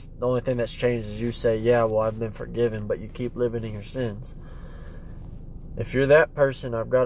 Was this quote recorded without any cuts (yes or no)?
yes